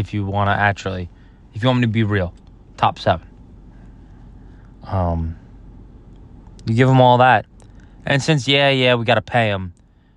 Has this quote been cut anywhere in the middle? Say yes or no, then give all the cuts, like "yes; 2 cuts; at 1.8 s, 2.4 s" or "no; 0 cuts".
no; 0 cuts